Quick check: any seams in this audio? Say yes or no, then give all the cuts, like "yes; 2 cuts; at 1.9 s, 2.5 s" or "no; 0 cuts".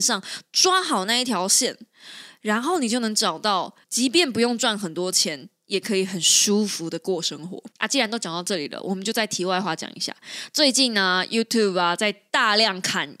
yes; 2 cuts; at 3.8 s, 7.7 s